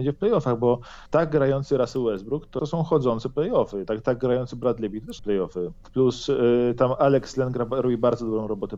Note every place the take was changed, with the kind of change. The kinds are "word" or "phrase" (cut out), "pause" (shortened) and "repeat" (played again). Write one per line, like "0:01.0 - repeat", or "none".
0:01.1 - pause
0:02.6 - word
0:05.2 - word